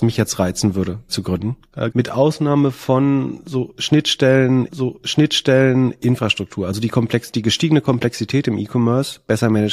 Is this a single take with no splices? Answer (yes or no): no